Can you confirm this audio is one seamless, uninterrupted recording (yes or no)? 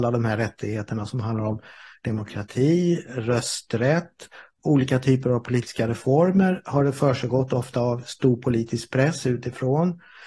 yes